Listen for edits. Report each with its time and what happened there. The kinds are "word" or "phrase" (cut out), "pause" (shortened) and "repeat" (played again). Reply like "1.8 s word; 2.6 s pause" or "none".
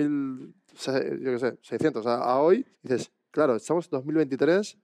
2.7 s pause

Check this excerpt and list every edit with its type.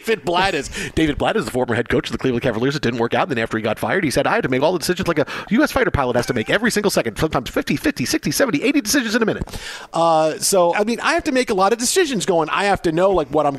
10.7 s word

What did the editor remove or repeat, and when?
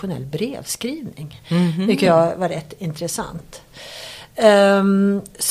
none

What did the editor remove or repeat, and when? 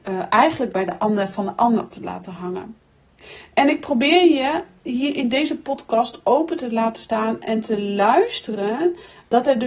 1.9 s word

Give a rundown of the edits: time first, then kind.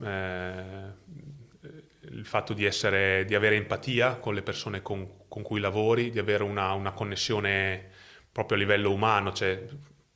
none

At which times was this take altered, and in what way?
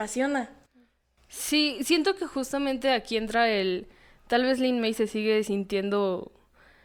none

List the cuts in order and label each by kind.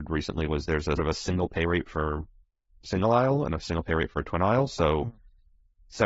1.0 s word

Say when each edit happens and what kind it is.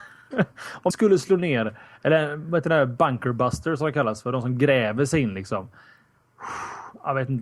0.9 s phrase

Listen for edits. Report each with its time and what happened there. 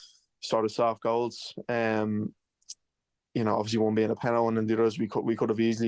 none

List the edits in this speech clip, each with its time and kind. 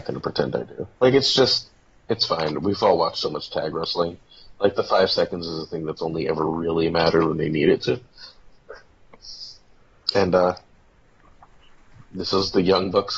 0.9 s pause

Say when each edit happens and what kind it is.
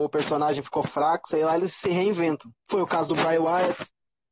2.6 s pause

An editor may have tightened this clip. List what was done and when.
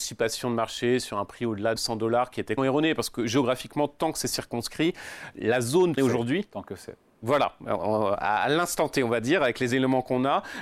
1.8 s word; 2.6 s word; 6.0 s phrase

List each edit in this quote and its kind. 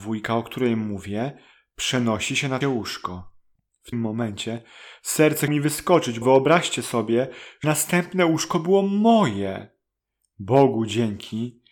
2.6 s word; 3.9 s word; 5.5 s word; 6.2 s word; 7.6 s word

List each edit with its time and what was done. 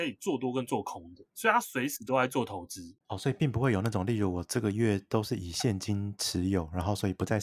1.3 s pause; 3.0 s pause

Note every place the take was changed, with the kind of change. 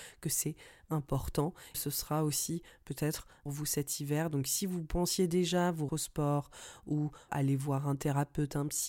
1.7 s phrase; 3.5 s phrase; 5.9 s word; 7.3 s word

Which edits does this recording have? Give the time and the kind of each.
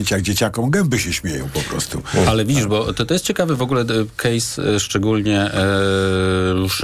none

